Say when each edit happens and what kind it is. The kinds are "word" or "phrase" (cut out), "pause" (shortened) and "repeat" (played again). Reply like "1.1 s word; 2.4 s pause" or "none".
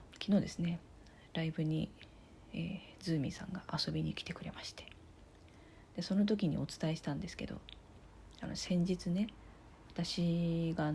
none